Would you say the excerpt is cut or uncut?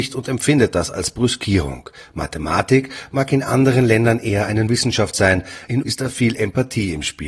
cut